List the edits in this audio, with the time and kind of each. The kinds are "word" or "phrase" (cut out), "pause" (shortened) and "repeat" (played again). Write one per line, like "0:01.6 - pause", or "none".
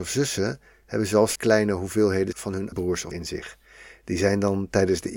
0:01.4 - word
0:02.3 - word
0:02.7 - word
0:03.1 - word